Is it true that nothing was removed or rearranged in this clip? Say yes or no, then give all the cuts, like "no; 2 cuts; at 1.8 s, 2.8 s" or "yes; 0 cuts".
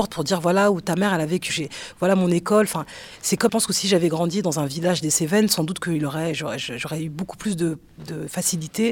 no; 2 cuts; at 1.5 s, 3.5 s